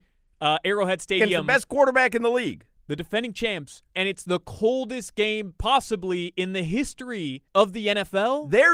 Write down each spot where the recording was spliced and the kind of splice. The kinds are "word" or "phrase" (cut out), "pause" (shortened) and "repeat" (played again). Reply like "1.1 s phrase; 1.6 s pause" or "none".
2.8 s pause; 3.9 s pause; 7.5 s pause